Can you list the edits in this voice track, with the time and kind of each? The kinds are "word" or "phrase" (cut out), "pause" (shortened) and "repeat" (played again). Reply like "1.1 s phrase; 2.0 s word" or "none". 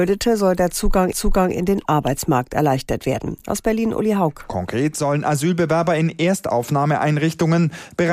1.1 s repeat